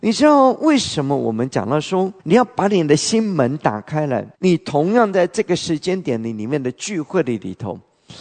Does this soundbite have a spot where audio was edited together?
yes; 2 cuts; at 2.2 s, 4.3 s

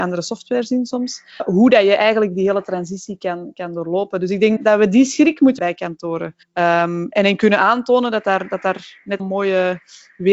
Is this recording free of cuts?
no; 5 cuts; at 1.4 s, 4.6 s, 5.6 s, 6.4 s, 9.2 s

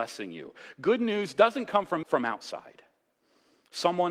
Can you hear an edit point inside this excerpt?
yes; 1 cut; at 2.0 s

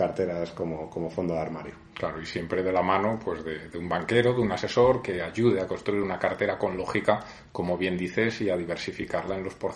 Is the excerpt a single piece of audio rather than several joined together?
yes; 0 cuts

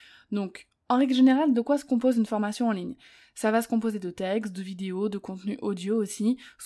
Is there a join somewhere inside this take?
no; 0 cuts

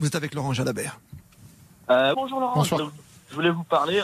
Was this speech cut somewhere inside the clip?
yes; 2 cuts; at 2.1 s, 2.8 s

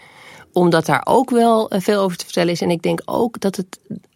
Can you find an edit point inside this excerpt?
no; 0 cuts

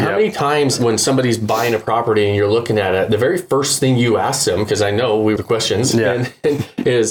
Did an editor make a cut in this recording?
yes; 1 cut; at 5.4 s

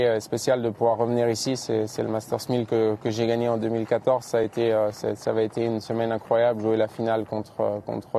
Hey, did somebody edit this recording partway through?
no; 0 cuts

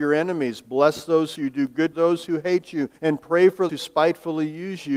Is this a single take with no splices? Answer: no; 4 cuts; at 1.4 s, 1.9 s, 3.0 s, 3.7 s

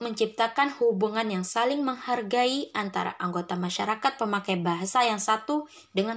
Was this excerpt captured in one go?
yes; 0 cuts

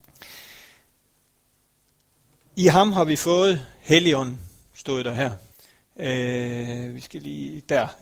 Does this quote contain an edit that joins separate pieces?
yes; 1 cut; at 5.5 s

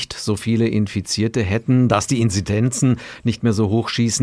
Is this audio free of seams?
yes; 0 cuts

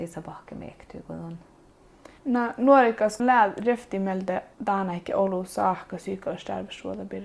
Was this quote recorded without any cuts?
no; 3 cuts; at 2.2 s, 3.2 s, 4.5 s

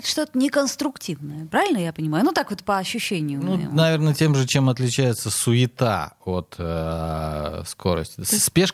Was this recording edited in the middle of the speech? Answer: no; 0 cuts

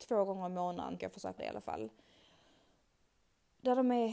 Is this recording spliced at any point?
yes; 2 cuts; at 1.0 s, 1.4 s

